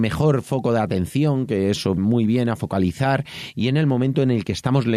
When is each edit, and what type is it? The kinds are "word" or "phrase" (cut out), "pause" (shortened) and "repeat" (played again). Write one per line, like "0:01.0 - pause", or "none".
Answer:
0:02.0 - word